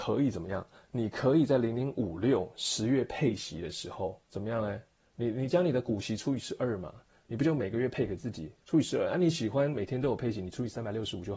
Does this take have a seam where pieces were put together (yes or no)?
yes